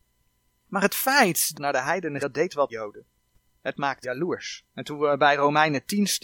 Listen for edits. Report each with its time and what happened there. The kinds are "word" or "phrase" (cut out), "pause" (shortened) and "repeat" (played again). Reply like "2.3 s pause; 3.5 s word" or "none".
1.5 s phrase; 2.2 s word; 2.7 s phrase; 4.0 s word; 4.7 s pause